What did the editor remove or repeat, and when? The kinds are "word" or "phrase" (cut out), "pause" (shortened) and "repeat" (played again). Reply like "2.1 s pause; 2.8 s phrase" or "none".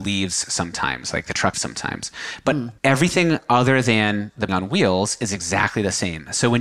1.5 s word; 2.8 s pause; 4.5 s phrase